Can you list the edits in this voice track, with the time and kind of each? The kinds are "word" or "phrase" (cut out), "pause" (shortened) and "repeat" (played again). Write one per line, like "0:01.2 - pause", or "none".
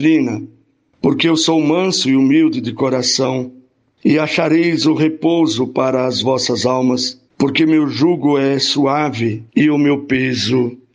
0:07.3 - pause
0:09.5 - pause